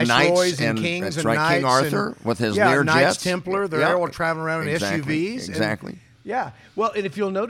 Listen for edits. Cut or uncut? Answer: uncut